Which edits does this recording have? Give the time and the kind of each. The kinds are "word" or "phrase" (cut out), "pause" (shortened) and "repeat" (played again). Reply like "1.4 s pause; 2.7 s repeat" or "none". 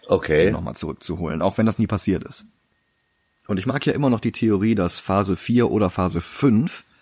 none